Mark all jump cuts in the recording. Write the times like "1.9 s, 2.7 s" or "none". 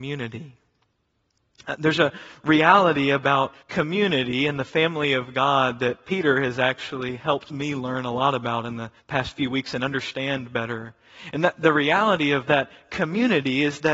3.6 s, 9.0 s